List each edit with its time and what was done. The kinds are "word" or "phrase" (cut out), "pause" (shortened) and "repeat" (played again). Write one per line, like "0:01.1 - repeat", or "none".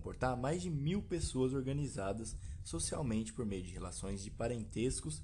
none